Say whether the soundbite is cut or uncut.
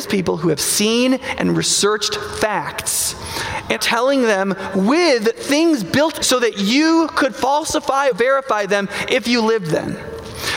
cut